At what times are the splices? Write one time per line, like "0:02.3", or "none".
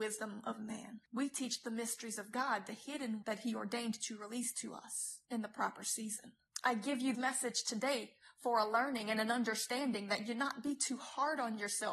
0:01.0
0:03.2
0:06.5
0:07.1